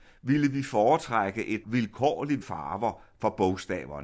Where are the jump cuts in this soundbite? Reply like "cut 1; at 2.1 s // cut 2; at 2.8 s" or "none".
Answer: cut 1; at 1.6 s // cut 2; at 2.4 s